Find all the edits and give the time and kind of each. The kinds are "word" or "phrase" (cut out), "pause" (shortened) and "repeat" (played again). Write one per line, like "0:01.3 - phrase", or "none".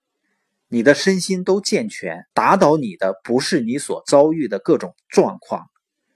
0:02.3 - pause